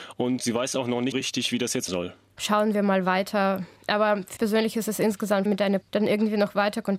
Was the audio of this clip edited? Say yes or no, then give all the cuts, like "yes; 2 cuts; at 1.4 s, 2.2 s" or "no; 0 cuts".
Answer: yes; 6 cuts; at 1.1 s, 1.9 s, 3.8 s, 4.4 s, 5.5 s, 5.8 s